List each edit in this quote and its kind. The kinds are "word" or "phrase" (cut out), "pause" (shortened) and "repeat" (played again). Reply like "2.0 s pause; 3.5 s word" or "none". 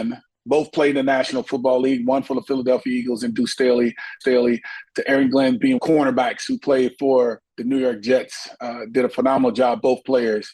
4.2 s repeat; 5.8 s phrase; 7.5 s pause